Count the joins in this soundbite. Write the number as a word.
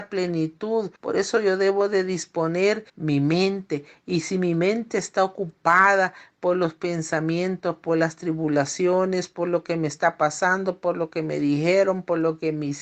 two